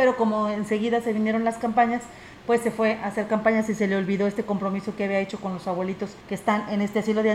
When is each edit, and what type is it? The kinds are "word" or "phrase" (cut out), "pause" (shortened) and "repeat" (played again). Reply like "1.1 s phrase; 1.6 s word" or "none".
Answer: 6.2 s pause